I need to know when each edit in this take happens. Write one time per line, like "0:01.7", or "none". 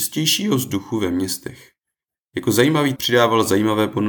0:03.0